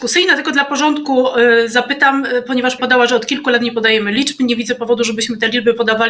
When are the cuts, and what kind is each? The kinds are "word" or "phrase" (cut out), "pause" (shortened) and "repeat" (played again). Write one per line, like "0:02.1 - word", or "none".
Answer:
0:02.8 - word